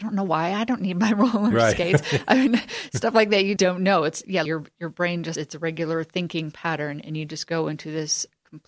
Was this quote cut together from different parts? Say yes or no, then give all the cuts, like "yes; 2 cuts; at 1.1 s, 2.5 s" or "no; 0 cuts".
yes; 3 cuts; at 3.6 s, 4.5 s, 5.4 s